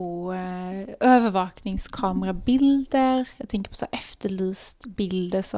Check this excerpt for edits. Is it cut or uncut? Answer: uncut